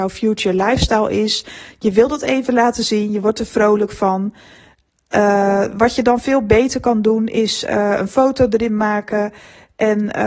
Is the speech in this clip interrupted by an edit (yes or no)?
no